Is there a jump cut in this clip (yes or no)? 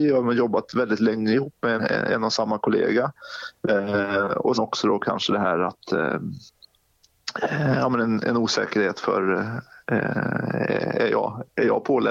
yes